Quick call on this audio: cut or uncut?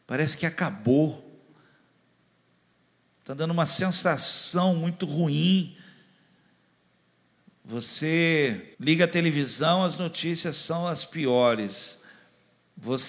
cut